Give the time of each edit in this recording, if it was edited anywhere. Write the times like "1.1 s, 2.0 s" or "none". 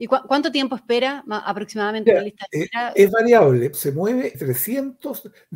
2.1 s, 3.7 s, 4.3 s